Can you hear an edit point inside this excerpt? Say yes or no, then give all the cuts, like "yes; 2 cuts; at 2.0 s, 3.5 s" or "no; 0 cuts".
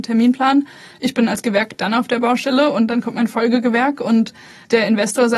no; 0 cuts